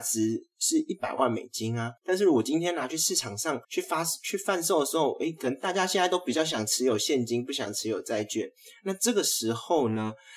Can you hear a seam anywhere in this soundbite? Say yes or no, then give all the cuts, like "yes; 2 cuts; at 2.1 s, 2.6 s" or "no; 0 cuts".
yes; 2 cuts; at 2.0 s, 3.6 s